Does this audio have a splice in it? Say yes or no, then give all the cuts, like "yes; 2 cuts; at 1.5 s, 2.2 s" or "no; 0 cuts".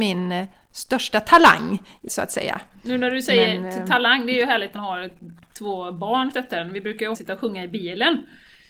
yes; 4 cuts; at 2.1 s, 4.7 s, 6.3 s, 7.1 s